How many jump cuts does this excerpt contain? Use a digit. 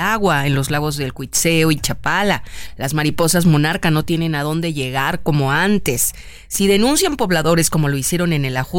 0